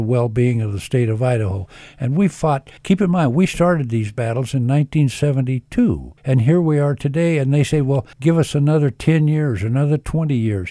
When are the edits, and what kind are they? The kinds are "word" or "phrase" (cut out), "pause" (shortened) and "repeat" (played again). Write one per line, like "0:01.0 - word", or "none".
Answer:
0:02.8 - pause
0:06.2 - pause
0:08.1 - pause